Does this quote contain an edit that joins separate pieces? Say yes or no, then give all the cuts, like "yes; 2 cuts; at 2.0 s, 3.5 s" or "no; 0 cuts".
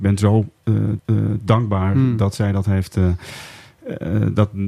yes; 1 cut; at 1.0 s